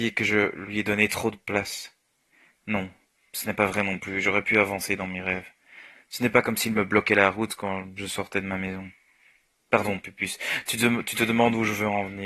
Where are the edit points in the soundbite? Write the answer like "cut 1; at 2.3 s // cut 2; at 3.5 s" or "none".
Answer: none